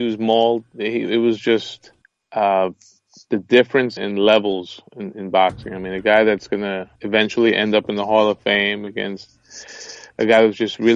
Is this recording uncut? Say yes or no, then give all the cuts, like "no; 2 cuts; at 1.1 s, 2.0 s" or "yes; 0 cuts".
no; 3 cuts; at 2.0 s, 4.0 s, 7.0 s